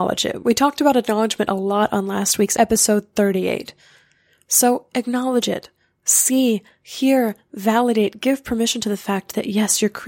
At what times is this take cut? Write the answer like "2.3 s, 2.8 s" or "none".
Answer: none